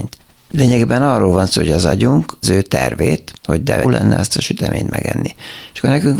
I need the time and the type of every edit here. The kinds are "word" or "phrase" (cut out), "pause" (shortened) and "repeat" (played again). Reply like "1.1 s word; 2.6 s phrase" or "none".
2.4 s phrase; 3.4 s pause; 3.8 s word